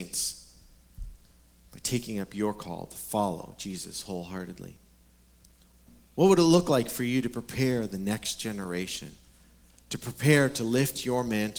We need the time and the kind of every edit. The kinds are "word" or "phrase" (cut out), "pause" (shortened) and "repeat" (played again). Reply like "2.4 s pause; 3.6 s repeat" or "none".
none